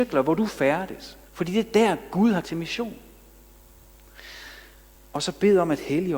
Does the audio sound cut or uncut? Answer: cut